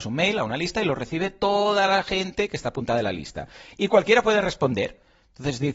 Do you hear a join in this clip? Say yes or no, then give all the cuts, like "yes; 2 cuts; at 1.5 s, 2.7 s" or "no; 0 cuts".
no; 0 cuts